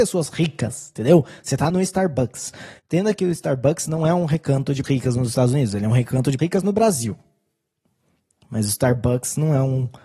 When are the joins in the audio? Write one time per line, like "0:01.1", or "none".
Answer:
0:01.7
0:04.8
0:06.4